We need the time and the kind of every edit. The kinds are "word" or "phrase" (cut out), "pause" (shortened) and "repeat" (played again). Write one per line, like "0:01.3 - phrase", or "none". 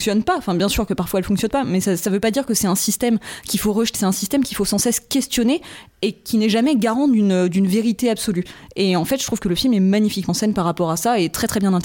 0:03.9 - word
0:10.3 - word